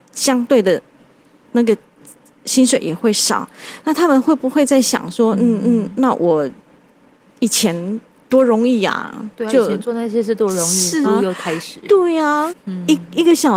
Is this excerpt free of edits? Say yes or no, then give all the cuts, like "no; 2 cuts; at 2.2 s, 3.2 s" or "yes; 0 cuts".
no; 4 cuts; at 5.6 s, 8.2 s, 11.0 s, 12.5 s